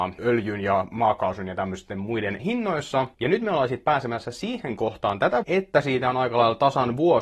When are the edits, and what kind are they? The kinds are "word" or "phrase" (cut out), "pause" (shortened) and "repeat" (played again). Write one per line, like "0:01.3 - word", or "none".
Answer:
0:02.4 - word
0:05.4 - word